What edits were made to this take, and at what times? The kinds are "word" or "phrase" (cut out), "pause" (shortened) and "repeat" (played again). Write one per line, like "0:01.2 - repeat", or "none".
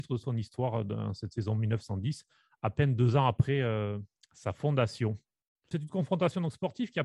none